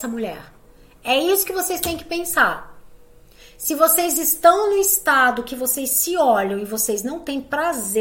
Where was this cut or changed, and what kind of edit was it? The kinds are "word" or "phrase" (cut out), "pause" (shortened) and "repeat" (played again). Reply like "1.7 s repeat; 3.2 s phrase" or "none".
none